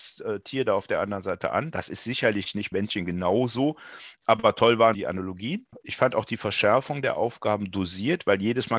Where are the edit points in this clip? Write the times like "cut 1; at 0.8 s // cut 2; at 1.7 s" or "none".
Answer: cut 1; at 2.7 s // cut 2; at 4.9 s